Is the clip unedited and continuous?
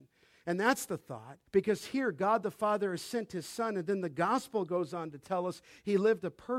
no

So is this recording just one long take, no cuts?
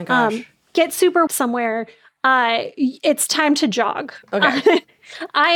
no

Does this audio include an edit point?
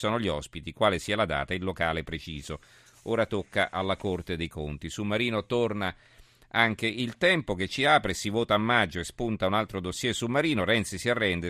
no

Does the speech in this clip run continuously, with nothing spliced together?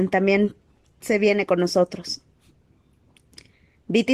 yes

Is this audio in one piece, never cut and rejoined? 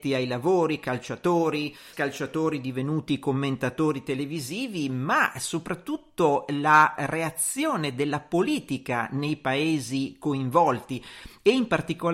no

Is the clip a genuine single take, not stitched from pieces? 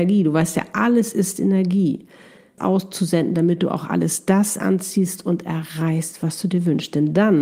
no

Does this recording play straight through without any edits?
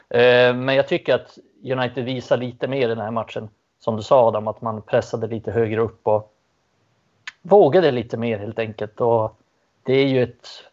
yes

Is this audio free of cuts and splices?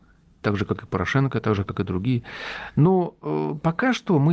yes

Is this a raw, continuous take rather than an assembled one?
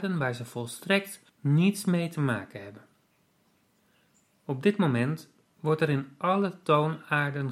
no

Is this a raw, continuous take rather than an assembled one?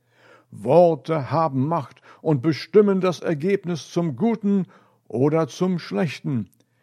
yes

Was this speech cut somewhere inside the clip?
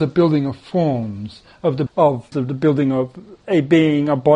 yes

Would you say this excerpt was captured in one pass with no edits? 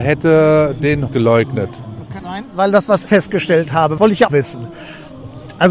no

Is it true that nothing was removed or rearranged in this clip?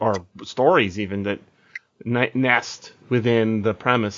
yes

